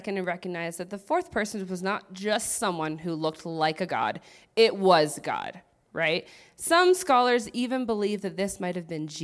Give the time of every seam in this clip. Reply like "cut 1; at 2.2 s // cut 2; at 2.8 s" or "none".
none